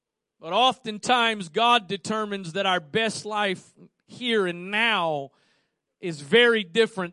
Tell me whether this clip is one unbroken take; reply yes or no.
yes